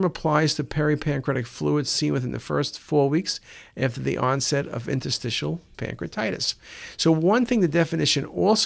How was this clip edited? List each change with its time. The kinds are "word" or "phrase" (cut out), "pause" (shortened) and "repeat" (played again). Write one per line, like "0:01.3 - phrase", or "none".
0:05.7 - word